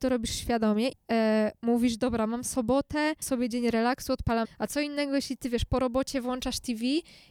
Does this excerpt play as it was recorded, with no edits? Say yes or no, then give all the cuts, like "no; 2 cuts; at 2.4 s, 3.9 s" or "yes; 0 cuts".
no; 3 cuts; at 0.9 s, 3.2 s, 4.4 s